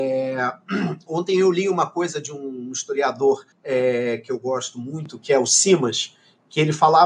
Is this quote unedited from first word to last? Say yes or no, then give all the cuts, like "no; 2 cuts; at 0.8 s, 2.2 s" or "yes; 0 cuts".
no; 1 cut; at 3.5 s